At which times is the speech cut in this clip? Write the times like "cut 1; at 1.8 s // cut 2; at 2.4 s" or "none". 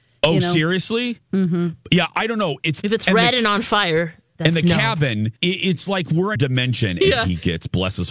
cut 1; at 2.8 s // cut 2; at 5.4 s // cut 3; at 6.4 s